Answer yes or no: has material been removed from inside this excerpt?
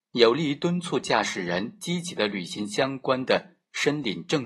no